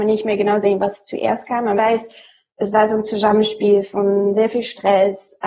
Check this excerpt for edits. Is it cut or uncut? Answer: cut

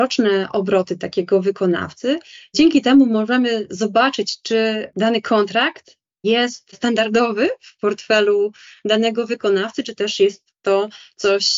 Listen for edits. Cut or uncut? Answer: uncut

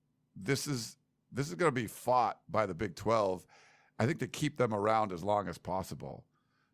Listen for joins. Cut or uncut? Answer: uncut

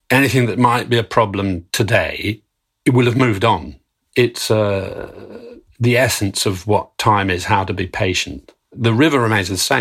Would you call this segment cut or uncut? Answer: cut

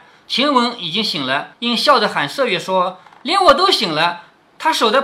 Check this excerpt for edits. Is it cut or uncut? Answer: cut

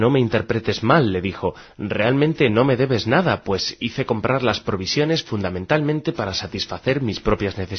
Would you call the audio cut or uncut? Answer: uncut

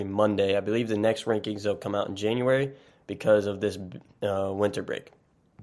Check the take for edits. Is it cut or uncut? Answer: uncut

